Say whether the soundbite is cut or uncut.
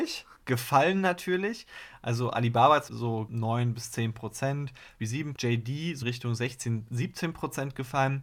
cut